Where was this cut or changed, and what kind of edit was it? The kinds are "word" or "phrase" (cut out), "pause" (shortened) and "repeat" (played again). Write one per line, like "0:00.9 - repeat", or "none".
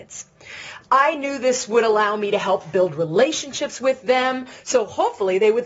none

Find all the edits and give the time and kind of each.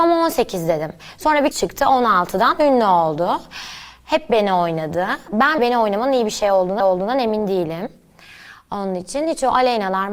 0:01.5 - word
0:05.6 - word
0:06.8 - repeat

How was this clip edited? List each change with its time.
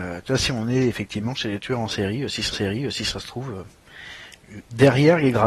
0:02.5 - repeat

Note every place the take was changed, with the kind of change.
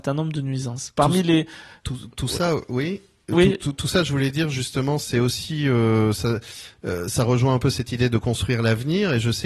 none

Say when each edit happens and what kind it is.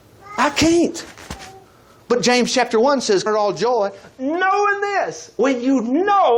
0:03.3 - word

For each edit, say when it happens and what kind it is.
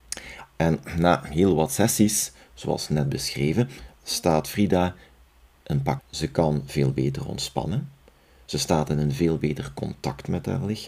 0:06.0 - word

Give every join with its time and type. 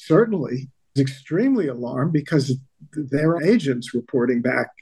0:01.0 - word
0:03.4 - word

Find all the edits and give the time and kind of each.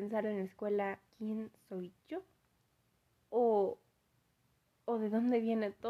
0:01.1 - pause
0:02.8 - pause

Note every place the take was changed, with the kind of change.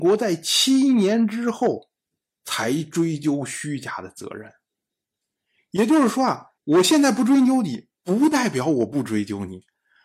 0:06.6 - pause

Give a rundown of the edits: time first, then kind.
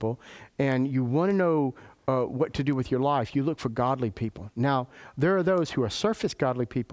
none

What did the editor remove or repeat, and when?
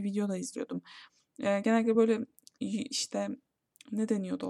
none

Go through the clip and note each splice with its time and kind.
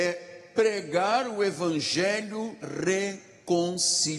0:02.6 - word

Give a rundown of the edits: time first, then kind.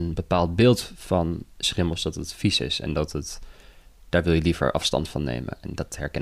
none

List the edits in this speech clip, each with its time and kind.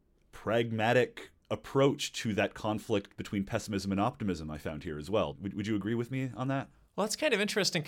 none

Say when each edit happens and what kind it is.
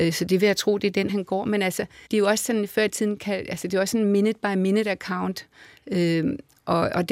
0:01.1 - word
0:02.1 - pause

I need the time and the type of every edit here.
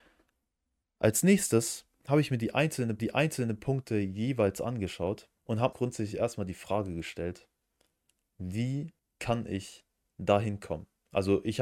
0:01.9 - pause
0:03.0 - repeat
0:05.4 - pause
0:05.7 - phrase
0:09.0 - pause

